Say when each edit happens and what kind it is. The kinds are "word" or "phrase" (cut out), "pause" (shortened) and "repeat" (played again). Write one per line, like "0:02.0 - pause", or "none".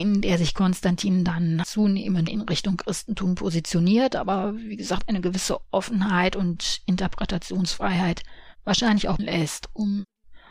0:01.6 - word
0:02.3 - word
0:09.2 - phrase